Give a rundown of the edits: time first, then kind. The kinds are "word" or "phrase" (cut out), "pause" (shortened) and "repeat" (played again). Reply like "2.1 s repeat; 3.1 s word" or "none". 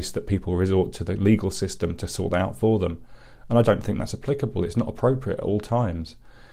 3.6 s word